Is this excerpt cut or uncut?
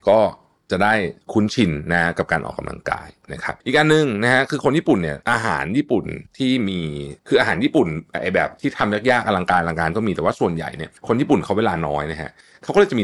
cut